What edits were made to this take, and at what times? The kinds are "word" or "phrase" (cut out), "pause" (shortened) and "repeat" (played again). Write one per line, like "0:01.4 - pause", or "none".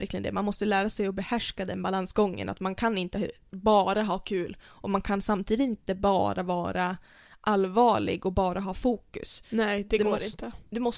none

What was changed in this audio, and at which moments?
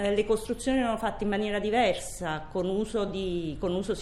none

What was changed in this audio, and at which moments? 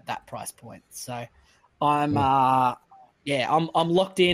none

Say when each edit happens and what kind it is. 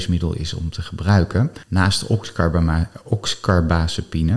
0:01.6 - pause

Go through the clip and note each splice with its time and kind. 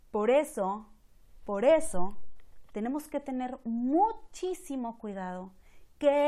none

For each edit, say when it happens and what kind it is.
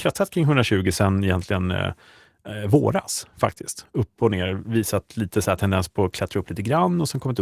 none

